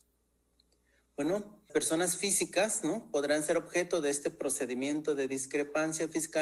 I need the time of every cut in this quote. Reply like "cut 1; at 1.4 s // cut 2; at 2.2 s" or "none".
cut 1; at 1.7 s